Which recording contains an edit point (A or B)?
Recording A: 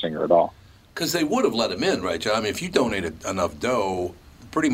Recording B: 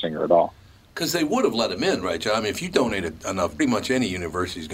B